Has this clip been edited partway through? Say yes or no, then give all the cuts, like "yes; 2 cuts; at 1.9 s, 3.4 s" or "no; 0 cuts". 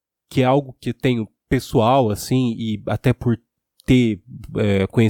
no; 0 cuts